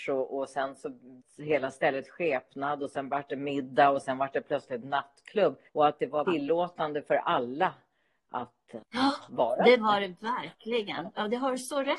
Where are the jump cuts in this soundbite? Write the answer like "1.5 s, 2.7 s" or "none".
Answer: 1.2 s, 5.7 s, 6.3 s